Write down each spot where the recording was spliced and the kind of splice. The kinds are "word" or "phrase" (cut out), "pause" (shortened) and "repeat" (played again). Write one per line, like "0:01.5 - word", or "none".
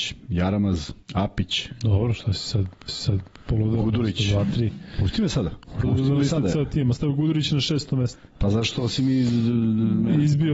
0:01.0 - pause
0:02.9 - repeat
0:05.8 - phrase